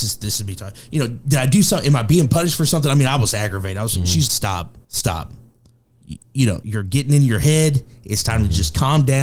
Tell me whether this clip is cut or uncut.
cut